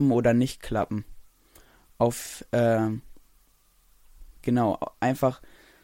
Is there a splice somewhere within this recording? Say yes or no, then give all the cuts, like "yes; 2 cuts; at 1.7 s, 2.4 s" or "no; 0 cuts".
no; 0 cuts